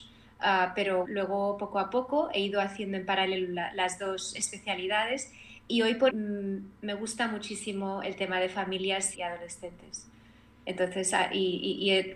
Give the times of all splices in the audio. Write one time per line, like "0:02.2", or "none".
0:01.0
0:06.1
0:09.1